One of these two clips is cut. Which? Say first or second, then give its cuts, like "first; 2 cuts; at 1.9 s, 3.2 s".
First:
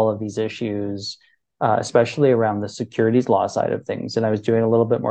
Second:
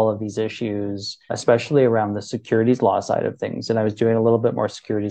second; 1 cut; at 1.3 s